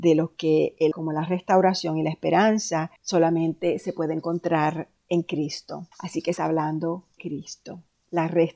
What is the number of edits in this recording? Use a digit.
6